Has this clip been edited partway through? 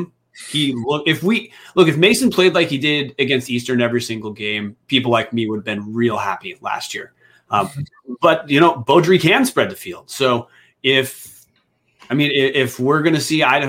no; 0 cuts

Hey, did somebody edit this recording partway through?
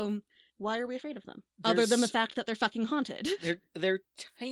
no; 0 cuts

